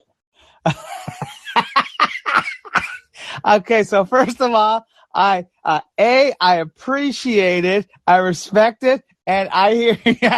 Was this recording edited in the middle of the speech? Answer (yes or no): no